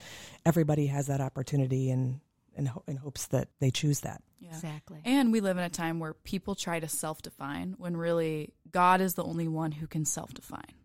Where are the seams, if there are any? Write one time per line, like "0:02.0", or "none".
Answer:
0:03.5